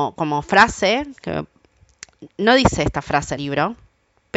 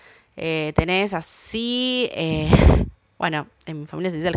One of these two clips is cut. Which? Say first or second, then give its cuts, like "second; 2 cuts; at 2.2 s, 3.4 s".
first; 2 cuts; at 2.3 s, 3.4 s